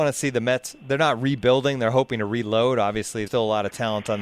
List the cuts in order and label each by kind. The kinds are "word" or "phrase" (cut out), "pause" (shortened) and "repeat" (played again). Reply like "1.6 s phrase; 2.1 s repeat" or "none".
3.3 s word